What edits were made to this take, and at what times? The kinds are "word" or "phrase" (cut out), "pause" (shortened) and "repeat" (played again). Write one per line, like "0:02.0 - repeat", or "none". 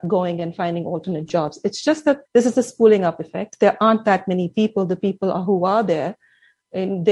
0:02.2 - pause